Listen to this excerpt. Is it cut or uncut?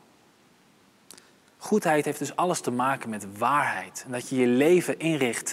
uncut